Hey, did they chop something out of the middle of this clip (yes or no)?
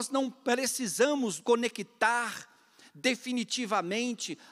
yes